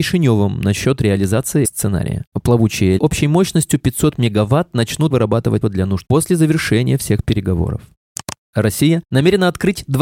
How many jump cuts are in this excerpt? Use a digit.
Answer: 5